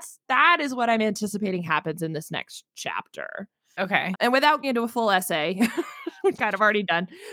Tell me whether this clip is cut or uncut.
cut